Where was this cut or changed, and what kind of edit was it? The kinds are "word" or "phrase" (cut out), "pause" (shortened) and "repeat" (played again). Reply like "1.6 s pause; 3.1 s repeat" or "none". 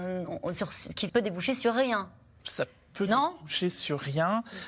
1.1 s word